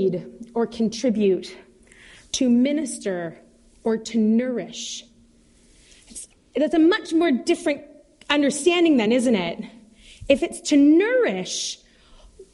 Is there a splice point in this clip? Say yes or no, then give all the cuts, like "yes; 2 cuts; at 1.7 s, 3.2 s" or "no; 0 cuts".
no; 0 cuts